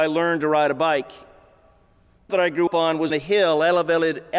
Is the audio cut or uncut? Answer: cut